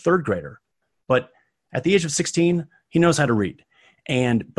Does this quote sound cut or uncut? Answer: uncut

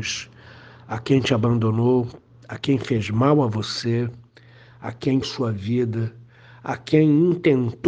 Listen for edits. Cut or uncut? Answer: cut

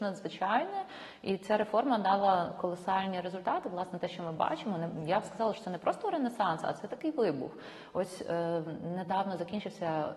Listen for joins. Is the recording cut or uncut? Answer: uncut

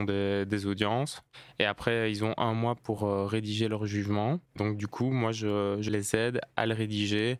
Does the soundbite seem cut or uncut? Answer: uncut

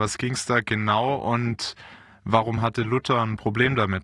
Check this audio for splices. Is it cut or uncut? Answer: uncut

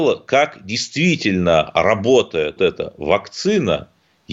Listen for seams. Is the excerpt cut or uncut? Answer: cut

